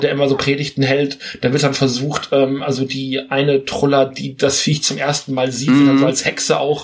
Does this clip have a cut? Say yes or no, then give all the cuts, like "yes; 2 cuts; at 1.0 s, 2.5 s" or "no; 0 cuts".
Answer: no; 0 cuts